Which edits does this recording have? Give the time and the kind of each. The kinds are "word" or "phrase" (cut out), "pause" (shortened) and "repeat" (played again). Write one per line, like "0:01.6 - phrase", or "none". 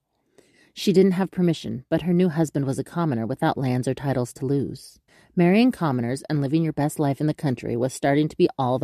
0:05.1 - pause